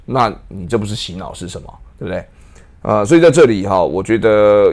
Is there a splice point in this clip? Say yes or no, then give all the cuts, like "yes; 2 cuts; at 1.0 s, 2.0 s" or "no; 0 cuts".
yes; 1 cut; at 1.9 s